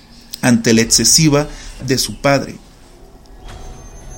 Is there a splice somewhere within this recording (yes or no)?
yes